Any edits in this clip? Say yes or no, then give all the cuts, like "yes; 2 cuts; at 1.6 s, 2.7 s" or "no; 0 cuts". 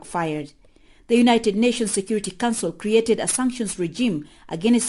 no; 0 cuts